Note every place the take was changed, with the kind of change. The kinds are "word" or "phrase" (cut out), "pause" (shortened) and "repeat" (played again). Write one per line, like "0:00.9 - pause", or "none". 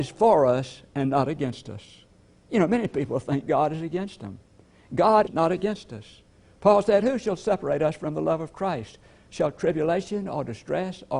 0:05.3 - phrase

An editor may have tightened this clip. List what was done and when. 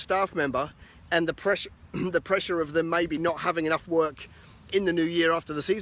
none

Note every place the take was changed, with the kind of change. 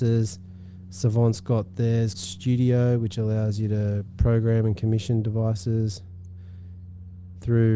0:02.1 - word

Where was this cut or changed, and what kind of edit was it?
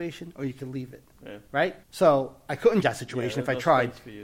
0:01.8 - pause
0:02.8 - word

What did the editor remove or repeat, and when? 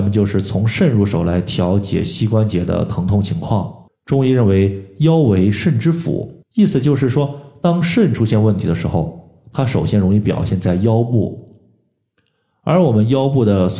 0:03.9 - pause
0:06.4 - pause

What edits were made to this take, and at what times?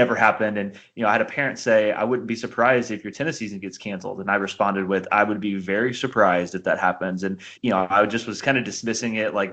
0:07.6 - pause

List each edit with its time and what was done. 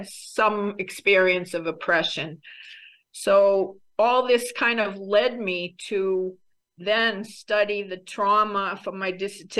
none

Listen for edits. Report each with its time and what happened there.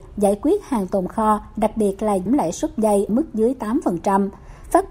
0:02.3 - word
0:03.1 - word

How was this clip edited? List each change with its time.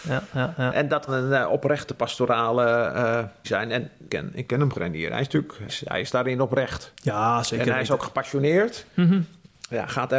0:01.1 - word
0:03.4 - word
0:04.1 - word
0:04.7 - word
0:05.7 - word

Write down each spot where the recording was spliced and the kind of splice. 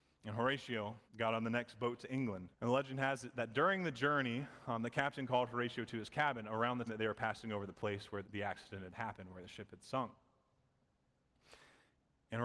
0:01.1 - pause
0:02.5 - pause
0:06.9 - word
0:08.2 - word

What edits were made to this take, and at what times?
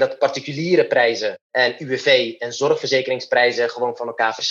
0:01.4 - pause

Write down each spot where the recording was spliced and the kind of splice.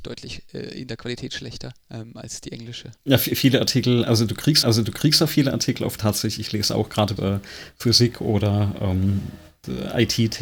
0:01.8 - pause
0:03.0 - pause
0:04.6 - repeat
0:06.0 - phrase
0:07.2 - phrase

